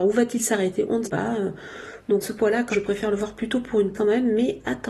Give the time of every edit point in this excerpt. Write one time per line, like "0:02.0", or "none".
0:01.0
0:02.2
0:02.7
0:03.9